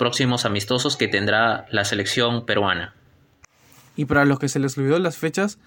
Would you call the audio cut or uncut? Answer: uncut